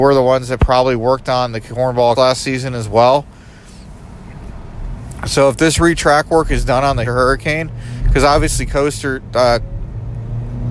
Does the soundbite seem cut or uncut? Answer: cut